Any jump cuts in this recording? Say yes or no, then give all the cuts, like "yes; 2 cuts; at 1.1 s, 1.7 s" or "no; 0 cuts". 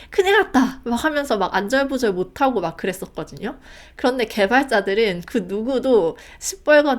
no; 0 cuts